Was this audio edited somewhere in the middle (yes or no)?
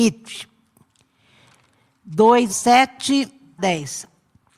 yes